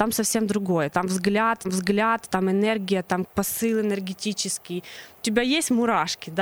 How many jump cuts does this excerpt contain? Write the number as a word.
three